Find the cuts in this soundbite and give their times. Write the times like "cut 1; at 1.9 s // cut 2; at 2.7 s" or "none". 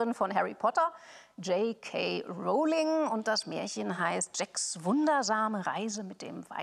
none